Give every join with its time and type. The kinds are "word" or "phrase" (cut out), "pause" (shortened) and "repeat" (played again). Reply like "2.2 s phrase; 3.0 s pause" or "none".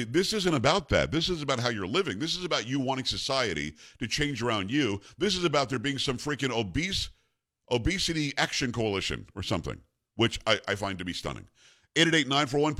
none